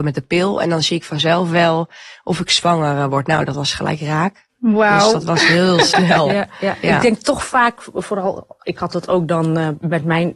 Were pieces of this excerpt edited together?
no; 0 cuts

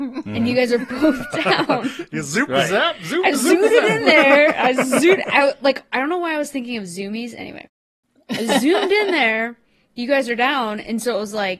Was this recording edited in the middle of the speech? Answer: no; 0 cuts

